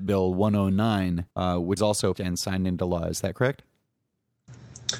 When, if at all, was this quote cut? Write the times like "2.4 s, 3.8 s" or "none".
1.3 s, 1.8 s, 2.1 s

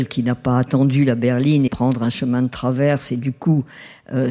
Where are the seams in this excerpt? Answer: 1.7 s

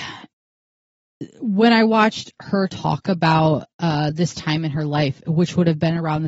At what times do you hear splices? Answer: none

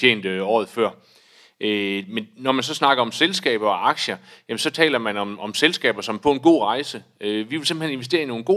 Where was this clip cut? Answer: none

